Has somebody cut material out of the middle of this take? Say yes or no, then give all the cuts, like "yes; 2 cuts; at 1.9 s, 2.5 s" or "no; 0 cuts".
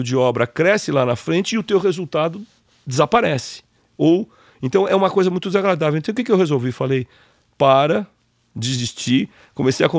no; 0 cuts